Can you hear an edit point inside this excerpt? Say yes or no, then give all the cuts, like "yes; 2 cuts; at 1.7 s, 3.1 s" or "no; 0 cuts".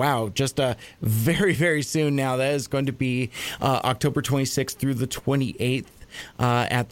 no; 0 cuts